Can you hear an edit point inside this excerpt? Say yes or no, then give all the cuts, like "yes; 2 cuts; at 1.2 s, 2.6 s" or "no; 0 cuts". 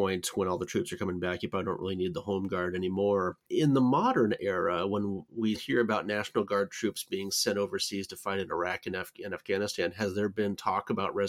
yes; 1 cut; at 5.5 s